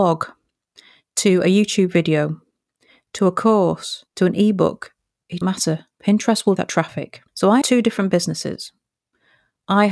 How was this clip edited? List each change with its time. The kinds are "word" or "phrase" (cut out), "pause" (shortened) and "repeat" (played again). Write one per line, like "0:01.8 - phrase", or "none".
0:04.1 - pause
0:05.4 - word
0:06.6 - word
0:07.3 - pause
0:07.6 - word